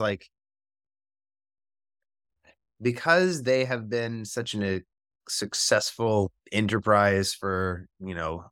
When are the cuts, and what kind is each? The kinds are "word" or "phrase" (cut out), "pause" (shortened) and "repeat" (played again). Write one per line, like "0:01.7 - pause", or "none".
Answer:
0:06.4 - pause